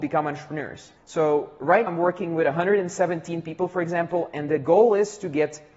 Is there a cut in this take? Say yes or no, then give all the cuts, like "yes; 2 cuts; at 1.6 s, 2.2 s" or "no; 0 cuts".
yes; 2 cuts; at 1.0 s, 1.9 s